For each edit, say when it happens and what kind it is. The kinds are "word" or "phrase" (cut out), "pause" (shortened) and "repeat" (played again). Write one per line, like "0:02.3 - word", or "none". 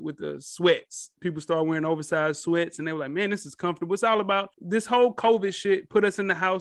0:01.2 - pause
0:04.5 - pause